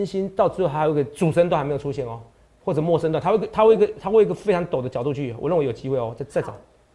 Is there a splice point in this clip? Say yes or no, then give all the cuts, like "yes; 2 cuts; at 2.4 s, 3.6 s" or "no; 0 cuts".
no; 0 cuts